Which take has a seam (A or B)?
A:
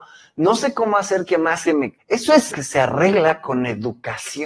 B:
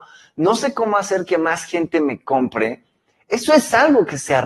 A